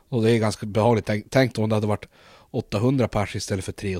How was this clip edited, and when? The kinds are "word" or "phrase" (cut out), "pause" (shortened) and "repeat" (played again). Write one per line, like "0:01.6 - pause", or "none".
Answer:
none